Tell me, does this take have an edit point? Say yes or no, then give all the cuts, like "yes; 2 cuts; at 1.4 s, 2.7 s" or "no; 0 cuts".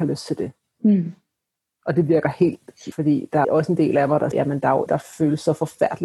yes; 4 cuts; at 2.9 s, 3.4 s, 4.3 s, 4.9 s